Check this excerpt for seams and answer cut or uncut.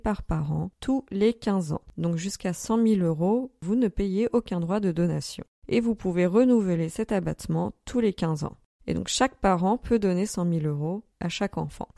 uncut